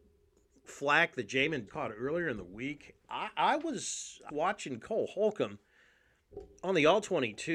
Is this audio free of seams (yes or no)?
no